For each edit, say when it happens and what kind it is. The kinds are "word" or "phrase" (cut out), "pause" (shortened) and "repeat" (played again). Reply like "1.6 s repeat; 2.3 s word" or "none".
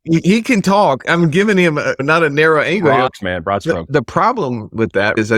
none